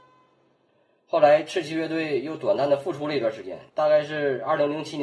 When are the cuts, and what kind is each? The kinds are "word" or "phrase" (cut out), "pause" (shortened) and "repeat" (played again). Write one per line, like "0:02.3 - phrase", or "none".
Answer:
0:03.7 - pause